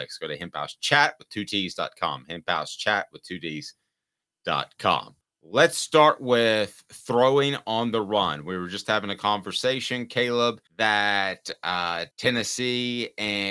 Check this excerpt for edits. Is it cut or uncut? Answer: cut